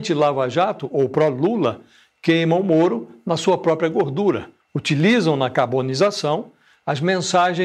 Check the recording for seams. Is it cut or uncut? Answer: uncut